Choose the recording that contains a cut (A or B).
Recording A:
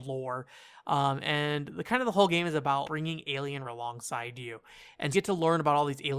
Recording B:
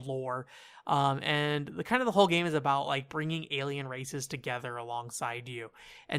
A